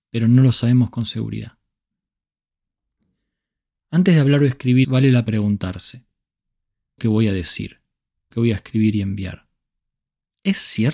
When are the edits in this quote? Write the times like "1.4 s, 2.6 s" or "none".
4.8 s, 5.3 s, 7.0 s, 8.3 s